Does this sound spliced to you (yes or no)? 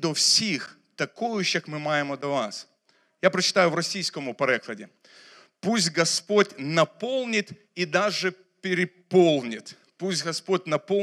no